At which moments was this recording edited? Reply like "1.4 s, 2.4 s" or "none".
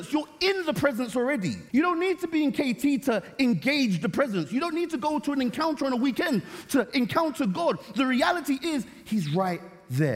1.7 s